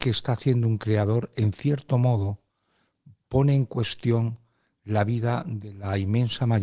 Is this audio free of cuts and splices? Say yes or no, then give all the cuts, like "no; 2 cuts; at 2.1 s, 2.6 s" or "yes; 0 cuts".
yes; 0 cuts